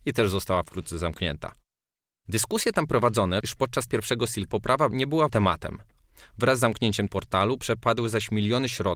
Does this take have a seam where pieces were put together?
yes; 6 cuts; at 3.4 s, 3.9 s, 4.5 s, 4.9 s, 5.3 s, 7.1 s

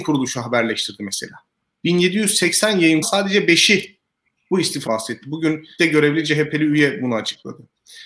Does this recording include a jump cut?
yes; 3 cuts; at 3.0 s, 4.9 s, 5.8 s

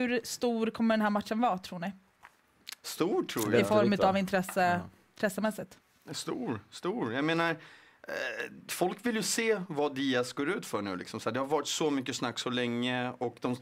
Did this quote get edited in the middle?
no; 0 cuts

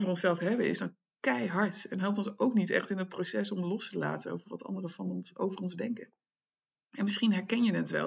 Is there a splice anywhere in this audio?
no; 0 cuts

